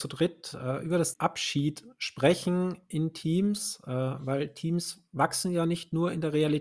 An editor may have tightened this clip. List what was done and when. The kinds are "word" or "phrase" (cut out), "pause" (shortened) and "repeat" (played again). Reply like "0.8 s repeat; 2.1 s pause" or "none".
1.1 s word